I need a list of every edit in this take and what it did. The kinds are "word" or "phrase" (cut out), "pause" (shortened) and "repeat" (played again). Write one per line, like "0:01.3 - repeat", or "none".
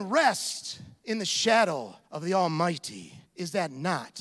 0:01.0 - pause
0:02.0 - pause
0:03.3 - pause

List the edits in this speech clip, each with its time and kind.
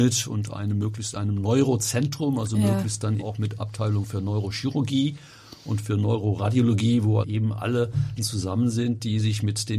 0:03.2 - word
0:03.6 - word
0:07.2 - word
0:08.2 - word

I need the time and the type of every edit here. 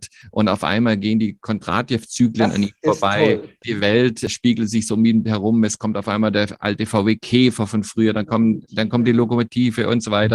none

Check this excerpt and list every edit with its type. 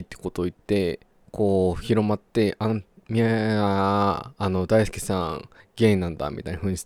0:05.6 - pause

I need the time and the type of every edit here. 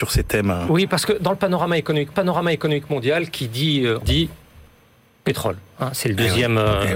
0:02.1 - repeat
0:04.0 - word

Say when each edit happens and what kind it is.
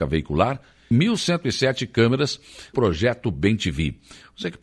0:00.9 - word
0:02.7 - word

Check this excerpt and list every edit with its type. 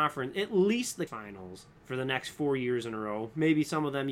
0:01.1 - word
0:01.8 - pause

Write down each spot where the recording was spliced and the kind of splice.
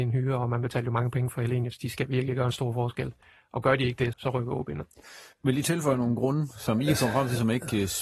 0:04.1 - word
0:05.3 - pause

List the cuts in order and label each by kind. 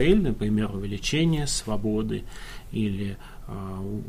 none

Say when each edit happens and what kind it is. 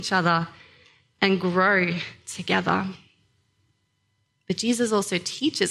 none

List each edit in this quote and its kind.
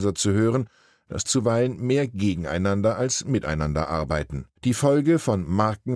0:01.2 - phrase
0:04.6 - pause

